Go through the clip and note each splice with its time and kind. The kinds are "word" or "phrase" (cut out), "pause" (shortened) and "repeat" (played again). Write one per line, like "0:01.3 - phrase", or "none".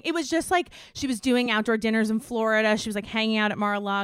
none